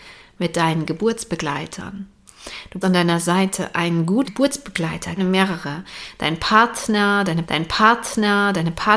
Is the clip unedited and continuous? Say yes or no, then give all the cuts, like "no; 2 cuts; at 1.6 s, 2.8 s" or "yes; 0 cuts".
no; 4 cuts; at 2.8 s, 4.2 s, 5.2 s, 7.4 s